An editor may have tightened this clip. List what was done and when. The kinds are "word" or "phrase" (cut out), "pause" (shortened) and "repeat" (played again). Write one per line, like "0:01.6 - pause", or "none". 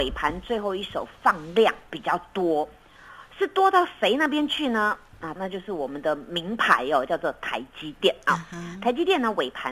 0:05.4 - phrase